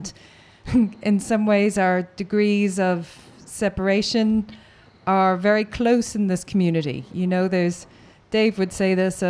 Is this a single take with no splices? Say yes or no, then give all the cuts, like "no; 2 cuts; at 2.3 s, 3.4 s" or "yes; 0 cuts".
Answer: yes; 0 cuts